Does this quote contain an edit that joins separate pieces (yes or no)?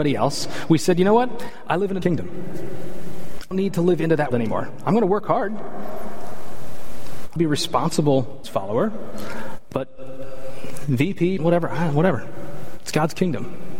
yes